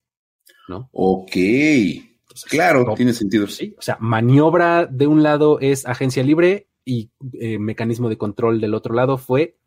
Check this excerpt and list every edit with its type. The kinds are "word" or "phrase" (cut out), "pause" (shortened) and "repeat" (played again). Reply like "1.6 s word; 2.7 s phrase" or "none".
none